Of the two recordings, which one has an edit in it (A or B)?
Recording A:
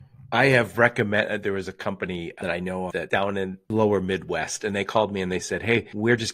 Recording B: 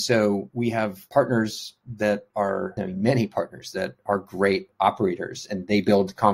A